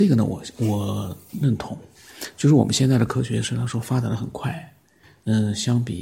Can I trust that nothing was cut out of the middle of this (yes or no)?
yes